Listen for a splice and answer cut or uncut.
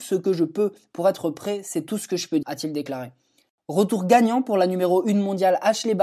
cut